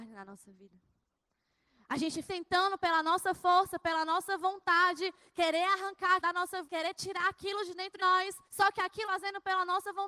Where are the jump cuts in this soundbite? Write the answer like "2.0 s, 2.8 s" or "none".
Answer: 2.3 s, 6.2 s, 6.7 s, 8.0 s, 8.4 s, 9.0 s